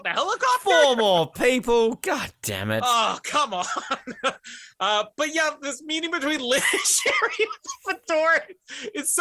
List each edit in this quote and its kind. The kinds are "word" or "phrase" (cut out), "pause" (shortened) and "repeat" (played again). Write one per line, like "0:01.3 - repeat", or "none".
none